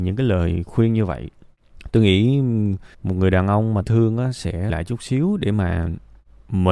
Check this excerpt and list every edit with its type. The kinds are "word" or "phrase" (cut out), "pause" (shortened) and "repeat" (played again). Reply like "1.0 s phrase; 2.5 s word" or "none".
2.9 s pause; 3.8 s phrase; 4.7 s word